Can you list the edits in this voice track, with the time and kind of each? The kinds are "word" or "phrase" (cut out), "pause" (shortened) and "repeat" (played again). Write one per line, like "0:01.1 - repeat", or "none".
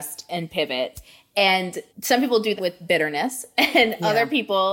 0:01.9 - pause
0:02.6 - word